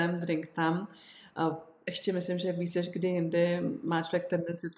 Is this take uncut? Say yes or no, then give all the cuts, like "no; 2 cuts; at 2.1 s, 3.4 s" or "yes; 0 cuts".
yes; 0 cuts